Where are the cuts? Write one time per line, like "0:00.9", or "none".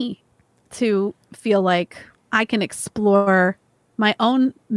0:02.1